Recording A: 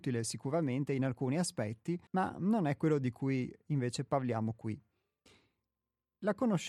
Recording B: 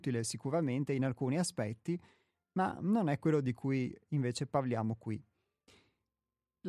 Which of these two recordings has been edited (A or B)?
A